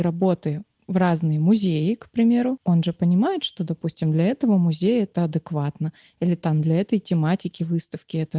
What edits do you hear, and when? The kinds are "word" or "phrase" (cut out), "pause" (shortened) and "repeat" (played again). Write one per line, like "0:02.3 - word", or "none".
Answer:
none